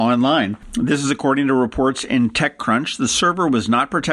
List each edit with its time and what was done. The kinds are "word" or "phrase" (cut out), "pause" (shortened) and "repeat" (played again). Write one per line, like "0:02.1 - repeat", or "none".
none